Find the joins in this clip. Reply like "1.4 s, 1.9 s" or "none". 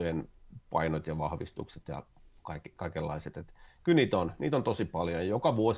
none